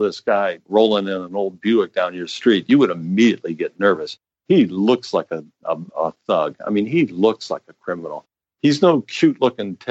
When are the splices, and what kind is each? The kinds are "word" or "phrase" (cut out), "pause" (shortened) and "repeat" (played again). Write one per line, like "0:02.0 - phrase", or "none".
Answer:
none